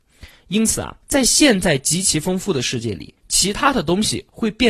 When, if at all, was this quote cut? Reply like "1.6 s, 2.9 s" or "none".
1.0 s, 3.2 s